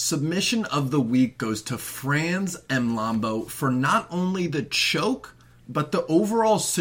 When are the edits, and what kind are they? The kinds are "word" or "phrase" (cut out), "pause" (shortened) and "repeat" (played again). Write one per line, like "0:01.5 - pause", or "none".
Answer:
none